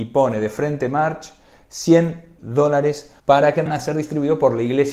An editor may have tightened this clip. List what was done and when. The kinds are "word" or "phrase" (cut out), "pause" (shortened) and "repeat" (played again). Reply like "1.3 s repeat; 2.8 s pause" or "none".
2.4 s word; 3.2 s pause; 3.7 s phrase